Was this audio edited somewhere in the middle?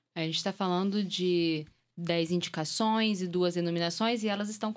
no; 0 cuts

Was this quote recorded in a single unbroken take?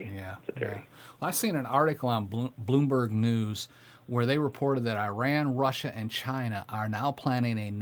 yes; 0 cuts

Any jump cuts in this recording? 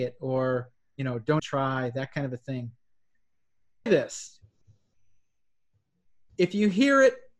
yes; 2 cuts; at 1.4 s, 3.9 s

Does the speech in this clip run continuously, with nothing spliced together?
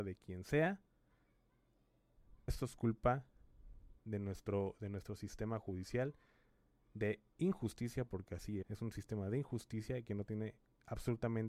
no; 3 cuts; at 2.5 s, 4.0 s, 8.6 s

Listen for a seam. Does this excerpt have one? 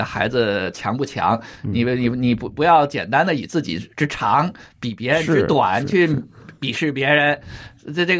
no; 0 cuts

